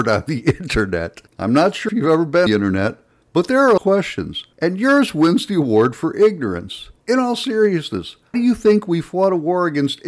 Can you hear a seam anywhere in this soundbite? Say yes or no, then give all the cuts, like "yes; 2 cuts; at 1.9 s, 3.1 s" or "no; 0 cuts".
yes; 7 cuts; at 1.3 s, 1.9 s, 2.5 s, 3.8 s, 4.5 s, 7.0 s, 8.3 s